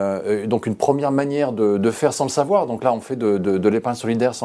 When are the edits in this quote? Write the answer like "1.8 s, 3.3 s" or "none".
none